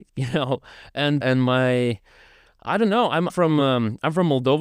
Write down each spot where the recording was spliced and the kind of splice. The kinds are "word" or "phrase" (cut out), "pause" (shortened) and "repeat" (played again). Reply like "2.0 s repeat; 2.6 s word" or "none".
1.2 s word; 3.3 s word